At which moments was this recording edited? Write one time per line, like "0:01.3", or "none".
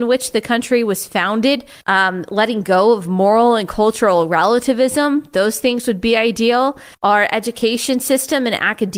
0:01.8
0:06.9